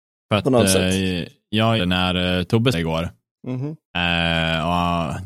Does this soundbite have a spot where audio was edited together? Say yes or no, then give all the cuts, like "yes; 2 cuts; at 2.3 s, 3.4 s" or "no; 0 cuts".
yes; 3 cuts; at 1.8 s, 2.7 s, 3.8 s